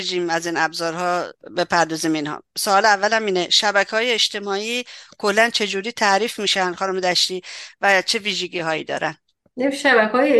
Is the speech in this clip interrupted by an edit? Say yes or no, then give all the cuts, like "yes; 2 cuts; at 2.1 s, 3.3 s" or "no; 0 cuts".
no; 0 cuts